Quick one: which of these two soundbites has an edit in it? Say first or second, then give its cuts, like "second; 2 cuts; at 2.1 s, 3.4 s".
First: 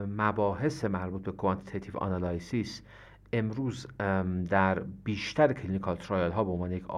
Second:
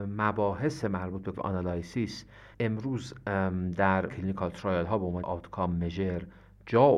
second; 4 cuts; at 1.3 s, 2.5 s, 4.1 s, 5.2 s